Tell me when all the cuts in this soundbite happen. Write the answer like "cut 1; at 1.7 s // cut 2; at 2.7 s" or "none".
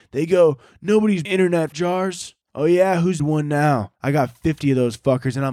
cut 1; at 1.2 s // cut 2; at 1.7 s // cut 3; at 2.4 s // cut 4; at 3.2 s // cut 5; at 4.0 s